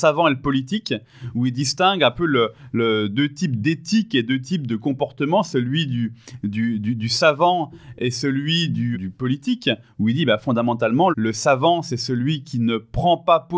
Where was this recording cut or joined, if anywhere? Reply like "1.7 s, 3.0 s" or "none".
8.9 s, 11.1 s